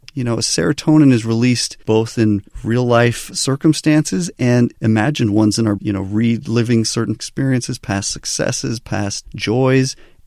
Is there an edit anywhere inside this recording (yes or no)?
yes